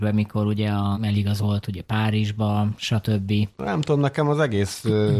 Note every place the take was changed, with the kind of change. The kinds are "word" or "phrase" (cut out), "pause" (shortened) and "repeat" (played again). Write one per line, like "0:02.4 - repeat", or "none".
0:00.9 - word